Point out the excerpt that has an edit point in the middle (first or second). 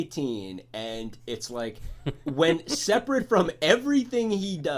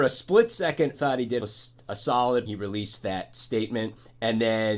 second